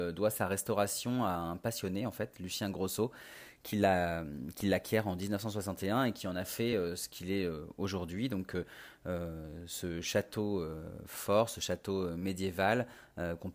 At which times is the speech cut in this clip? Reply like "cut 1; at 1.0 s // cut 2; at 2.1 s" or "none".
none